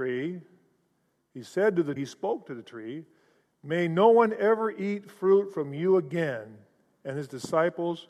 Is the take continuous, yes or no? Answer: no